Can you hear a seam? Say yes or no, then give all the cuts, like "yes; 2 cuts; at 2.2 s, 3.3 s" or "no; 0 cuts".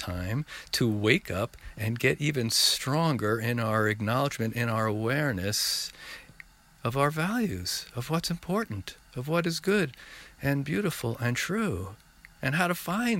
no; 0 cuts